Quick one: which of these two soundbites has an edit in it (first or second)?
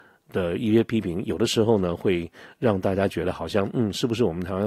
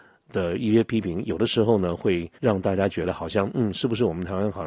second